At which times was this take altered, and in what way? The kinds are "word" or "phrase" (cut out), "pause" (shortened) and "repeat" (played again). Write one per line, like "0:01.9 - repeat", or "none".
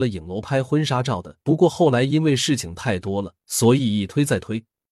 0:01.4 - pause
0:03.4 - pause